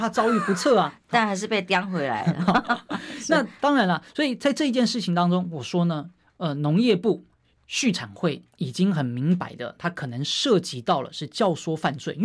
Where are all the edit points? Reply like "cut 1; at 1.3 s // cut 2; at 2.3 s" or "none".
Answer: none

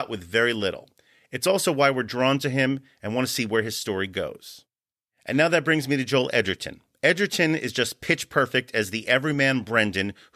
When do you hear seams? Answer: none

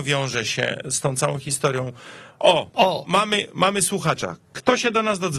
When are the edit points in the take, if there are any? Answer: none

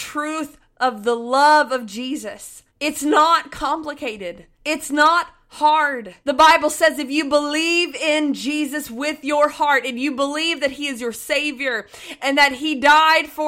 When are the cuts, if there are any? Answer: cut 1; at 2.7 s // cut 2; at 4.5 s // cut 3; at 6.2 s

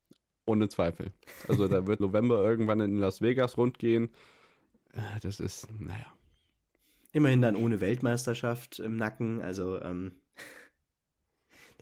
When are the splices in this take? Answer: cut 1; at 2.0 s

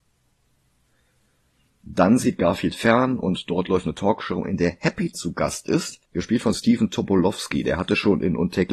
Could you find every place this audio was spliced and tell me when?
cut 1; at 5.1 s // cut 2; at 6.0 s

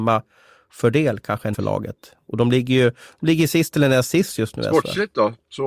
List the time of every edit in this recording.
cut 1; at 1.5 s

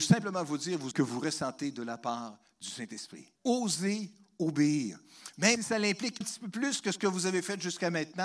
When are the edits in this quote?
cut 1; at 0.9 s // cut 2; at 3.4 s // cut 3; at 5.6 s // cut 4; at 6.2 s

